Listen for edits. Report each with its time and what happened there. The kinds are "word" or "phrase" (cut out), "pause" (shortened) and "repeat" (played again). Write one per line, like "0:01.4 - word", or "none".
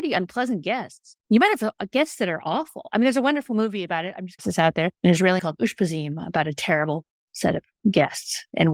0:01.2 - pause
0:04.4 - phrase
0:04.9 - pause
0:05.4 - word